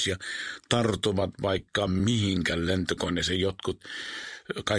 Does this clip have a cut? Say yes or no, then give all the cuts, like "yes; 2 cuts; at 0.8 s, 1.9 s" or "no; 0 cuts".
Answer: no; 0 cuts